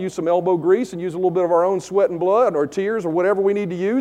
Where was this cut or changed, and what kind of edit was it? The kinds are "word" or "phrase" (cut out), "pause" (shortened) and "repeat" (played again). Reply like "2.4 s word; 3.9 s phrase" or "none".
none